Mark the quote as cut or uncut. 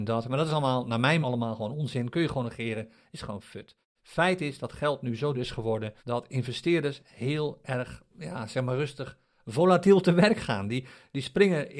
cut